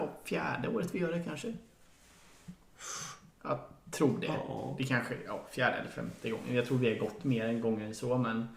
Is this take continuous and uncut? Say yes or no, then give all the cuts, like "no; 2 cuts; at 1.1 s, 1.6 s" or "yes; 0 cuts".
yes; 0 cuts